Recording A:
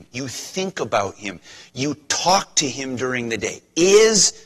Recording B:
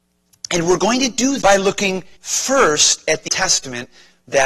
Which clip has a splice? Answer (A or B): B